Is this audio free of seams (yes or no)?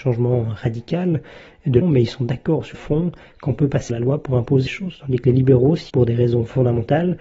no